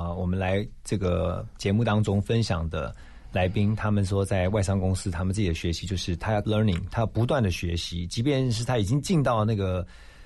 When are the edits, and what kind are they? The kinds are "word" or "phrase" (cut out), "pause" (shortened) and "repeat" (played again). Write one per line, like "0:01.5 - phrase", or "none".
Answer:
0:06.4 - word